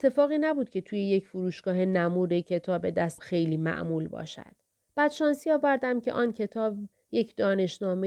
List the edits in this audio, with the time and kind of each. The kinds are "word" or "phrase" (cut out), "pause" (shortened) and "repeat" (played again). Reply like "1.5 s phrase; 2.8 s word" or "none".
3.2 s word; 4.8 s pause